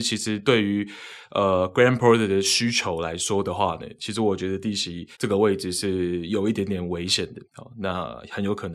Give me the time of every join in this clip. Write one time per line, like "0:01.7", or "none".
0:05.1
0:07.4